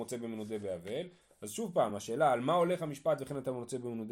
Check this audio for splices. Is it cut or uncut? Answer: uncut